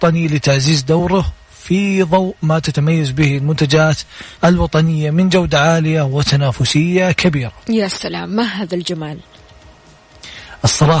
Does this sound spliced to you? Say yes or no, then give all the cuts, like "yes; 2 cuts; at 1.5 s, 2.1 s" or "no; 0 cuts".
yes; 1 cut; at 4.3 s